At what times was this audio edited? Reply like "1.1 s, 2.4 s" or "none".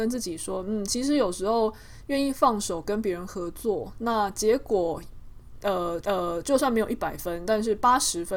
6.0 s